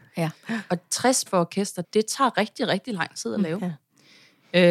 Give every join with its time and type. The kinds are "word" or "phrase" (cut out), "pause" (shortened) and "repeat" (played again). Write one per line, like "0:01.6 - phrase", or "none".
0:01.3 - word
0:01.8 - word